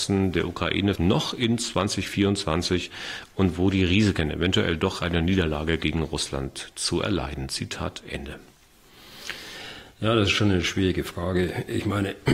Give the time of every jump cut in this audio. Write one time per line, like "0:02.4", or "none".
0:00.9